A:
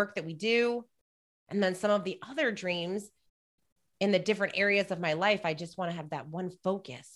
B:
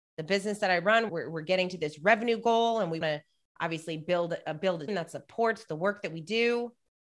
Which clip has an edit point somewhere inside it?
B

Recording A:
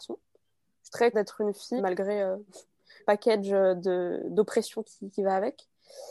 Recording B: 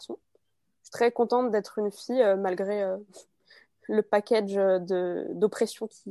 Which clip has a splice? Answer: A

